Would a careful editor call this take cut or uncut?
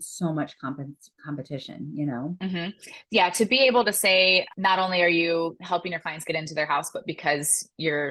uncut